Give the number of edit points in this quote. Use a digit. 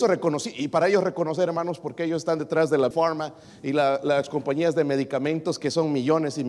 1